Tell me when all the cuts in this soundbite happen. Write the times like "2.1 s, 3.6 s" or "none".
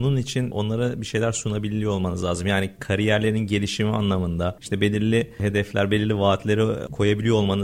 none